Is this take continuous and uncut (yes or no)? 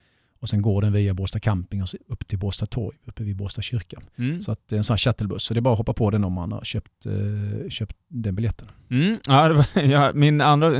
yes